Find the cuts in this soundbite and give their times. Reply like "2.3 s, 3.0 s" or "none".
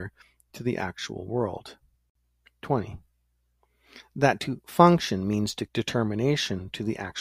5.7 s